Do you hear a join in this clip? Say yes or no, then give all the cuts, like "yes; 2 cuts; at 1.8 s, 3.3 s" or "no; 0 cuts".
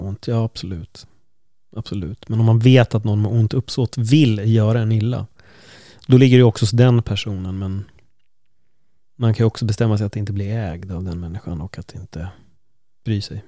no; 0 cuts